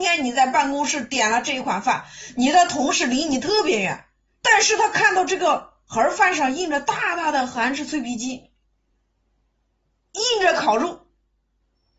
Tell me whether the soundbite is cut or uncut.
uncut